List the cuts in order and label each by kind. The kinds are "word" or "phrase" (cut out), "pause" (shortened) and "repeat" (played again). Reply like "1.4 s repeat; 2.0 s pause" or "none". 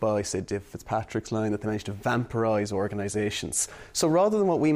none

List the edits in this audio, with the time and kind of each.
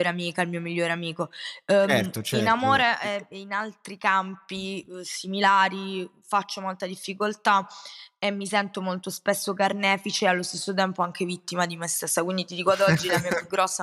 none

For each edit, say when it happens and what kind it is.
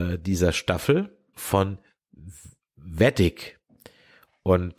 1.3 s word

